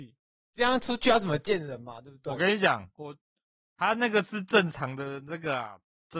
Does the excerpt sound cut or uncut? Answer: uncut